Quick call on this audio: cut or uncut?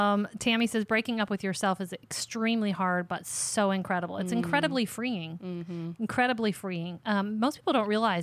uncut